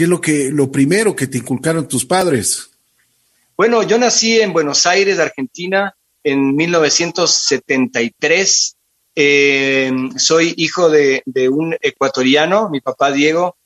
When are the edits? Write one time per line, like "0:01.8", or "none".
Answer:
none

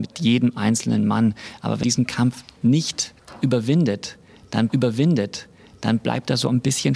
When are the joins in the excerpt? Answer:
0:01.8
0:04.7

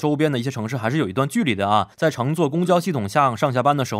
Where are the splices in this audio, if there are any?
0:01.9

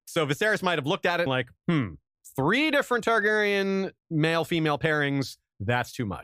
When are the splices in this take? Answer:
0:01.3
0:01.6
0:04.0

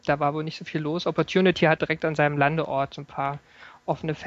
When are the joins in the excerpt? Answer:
0:01.8

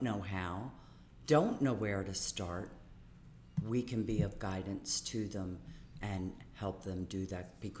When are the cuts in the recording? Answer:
none

